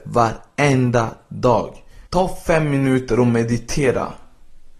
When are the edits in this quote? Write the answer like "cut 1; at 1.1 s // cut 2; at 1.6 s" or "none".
cut 1; at 2.1 s